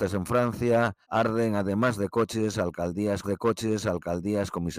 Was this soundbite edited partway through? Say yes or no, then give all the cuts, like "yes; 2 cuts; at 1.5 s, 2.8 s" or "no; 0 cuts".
yes; 2 cuts; at 1.0 s, 3.2 s